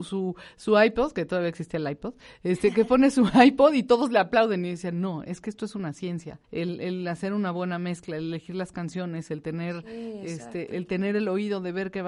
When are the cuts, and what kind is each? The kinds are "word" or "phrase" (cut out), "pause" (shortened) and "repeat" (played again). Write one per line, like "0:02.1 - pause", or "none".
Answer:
0:06.4 - pause
0:10.7 - word